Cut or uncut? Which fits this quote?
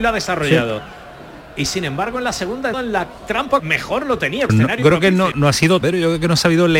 cut